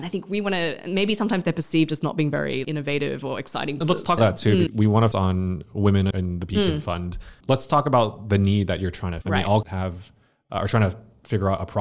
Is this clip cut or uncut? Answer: cut